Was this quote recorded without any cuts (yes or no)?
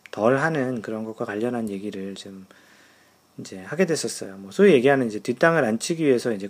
yes